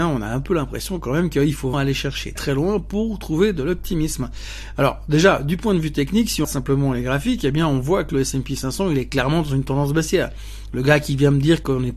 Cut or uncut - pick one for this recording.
cut